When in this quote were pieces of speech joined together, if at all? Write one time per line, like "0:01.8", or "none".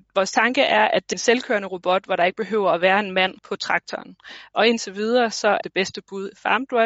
0:01.1
0:03.4
0:05.6